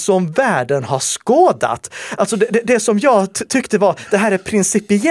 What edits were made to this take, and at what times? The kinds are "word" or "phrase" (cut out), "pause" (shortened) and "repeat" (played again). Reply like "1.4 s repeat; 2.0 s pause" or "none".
none